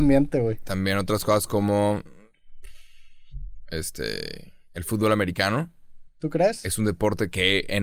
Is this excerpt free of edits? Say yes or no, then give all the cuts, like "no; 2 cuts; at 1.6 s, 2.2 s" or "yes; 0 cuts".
yes; 0 cuts